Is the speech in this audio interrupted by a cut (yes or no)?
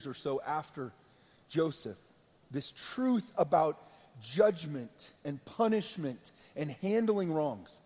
no